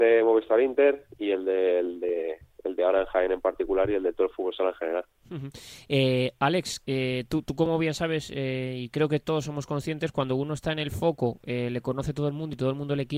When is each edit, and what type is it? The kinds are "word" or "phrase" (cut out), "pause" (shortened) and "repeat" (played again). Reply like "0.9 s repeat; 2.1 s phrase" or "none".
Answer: 6.8 s pause